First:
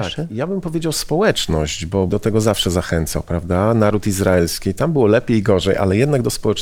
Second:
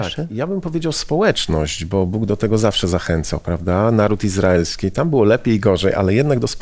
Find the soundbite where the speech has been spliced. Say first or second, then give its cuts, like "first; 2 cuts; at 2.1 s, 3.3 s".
first; 1 cut; at 2.1 s